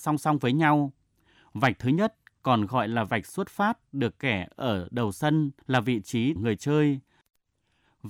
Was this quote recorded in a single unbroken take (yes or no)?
no